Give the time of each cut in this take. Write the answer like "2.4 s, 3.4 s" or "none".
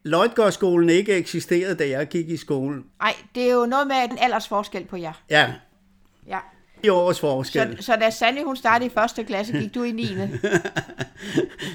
2.9 s, 4.1 s, 6.8 s